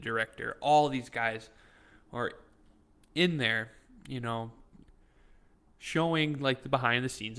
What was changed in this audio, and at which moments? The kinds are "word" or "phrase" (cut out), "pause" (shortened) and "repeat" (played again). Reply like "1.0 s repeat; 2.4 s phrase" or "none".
none